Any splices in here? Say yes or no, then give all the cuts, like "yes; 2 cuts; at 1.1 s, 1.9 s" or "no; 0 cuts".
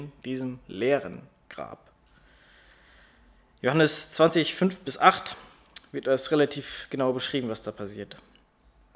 no; 0 cuts